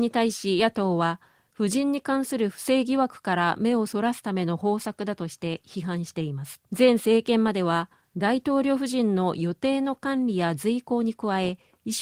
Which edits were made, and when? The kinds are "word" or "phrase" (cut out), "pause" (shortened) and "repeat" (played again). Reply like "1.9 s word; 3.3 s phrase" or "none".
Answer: 6.7 s pause